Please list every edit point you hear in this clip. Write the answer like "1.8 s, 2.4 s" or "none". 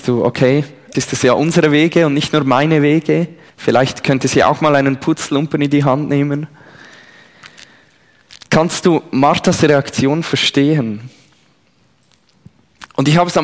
0.9 s, 3.5 s, 8.4 s